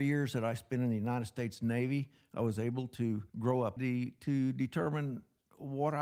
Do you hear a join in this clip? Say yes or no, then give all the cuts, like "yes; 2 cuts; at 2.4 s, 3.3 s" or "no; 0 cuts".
yes; 2 cuts; at 3.3 s, 3.8 s